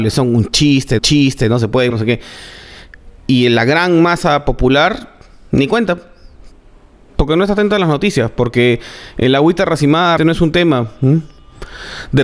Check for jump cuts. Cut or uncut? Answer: cut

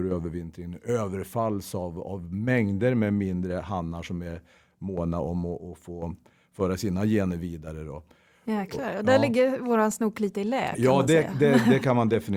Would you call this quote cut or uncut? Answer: uncut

